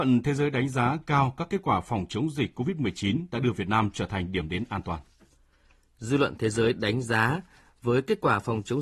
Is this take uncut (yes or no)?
yes